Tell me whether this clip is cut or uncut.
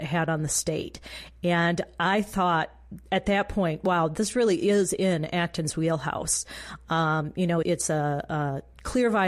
cut